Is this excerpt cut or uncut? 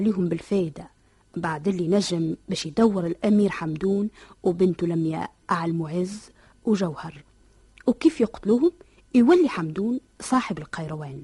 uncut